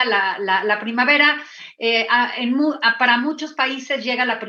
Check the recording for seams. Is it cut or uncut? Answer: uncut